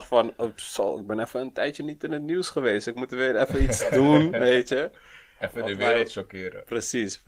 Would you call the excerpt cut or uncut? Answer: uncut